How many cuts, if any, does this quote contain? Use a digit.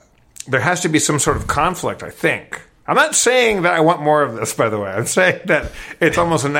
0